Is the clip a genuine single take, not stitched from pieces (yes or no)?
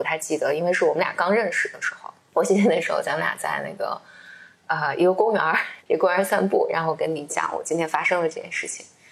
no